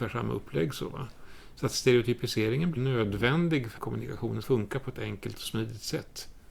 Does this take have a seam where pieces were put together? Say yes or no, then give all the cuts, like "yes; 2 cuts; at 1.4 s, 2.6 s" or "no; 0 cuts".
yes; 3 cuts; at 2.8 s, 3.8 s, 4.4 s